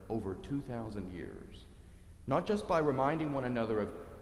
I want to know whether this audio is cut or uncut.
uncut